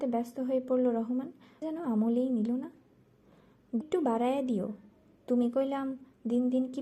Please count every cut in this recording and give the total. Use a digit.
2